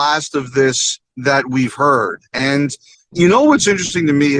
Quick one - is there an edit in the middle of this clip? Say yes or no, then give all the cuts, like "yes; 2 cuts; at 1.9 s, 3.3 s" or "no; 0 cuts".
yes; 2 cuts; at 1.1 s, 2.9 s